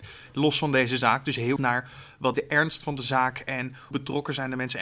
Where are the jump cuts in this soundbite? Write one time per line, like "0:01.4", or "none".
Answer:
0:01.6
0:02.3
0:03.9